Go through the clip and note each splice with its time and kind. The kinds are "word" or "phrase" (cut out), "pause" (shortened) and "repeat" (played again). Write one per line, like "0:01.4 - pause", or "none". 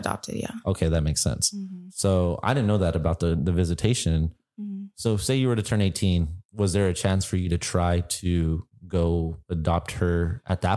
none